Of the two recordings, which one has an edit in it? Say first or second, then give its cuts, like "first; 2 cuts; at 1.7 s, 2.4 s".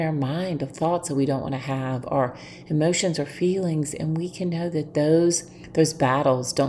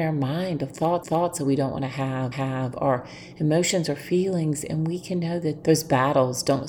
second; 3 cuts; at 1.0 s, 2.3 s, 5.6 s